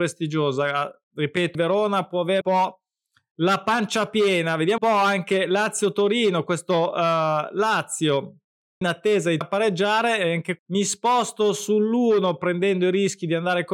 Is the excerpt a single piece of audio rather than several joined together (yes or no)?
no